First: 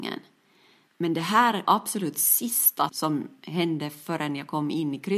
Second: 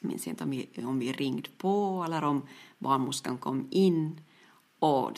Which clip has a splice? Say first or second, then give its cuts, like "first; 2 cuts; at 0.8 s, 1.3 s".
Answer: first; 2 cuts; at 1.6 s, 2.9 s